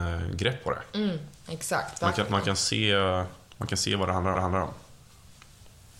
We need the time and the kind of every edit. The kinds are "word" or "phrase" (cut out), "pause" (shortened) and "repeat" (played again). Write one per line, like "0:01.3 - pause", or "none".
0:03.4 - pause
0:04.3 - repeat